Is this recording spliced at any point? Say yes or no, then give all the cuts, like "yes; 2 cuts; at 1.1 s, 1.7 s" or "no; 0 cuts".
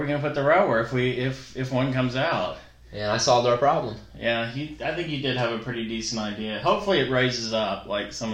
no; 0 cuts